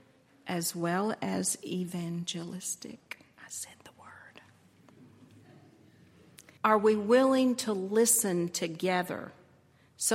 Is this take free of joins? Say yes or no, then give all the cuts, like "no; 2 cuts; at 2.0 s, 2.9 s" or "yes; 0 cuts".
no; 1 cut; at 6.6 s